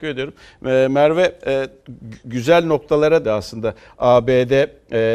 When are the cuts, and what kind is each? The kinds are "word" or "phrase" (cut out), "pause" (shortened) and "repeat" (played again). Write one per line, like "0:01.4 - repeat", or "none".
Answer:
0:03.2 - word